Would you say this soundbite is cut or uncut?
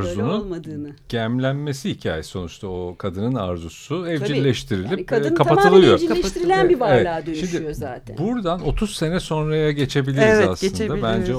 uncut